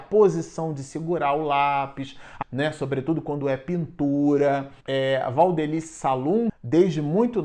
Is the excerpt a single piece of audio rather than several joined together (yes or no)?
no